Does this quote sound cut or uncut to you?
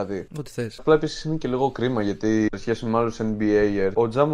uncut